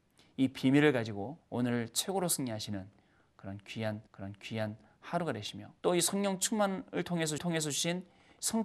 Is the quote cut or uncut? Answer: cut